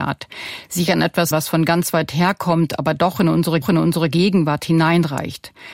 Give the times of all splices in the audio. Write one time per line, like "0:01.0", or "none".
0:01.3
0:03.6